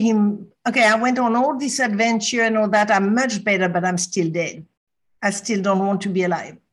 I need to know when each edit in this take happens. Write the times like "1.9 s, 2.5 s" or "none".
none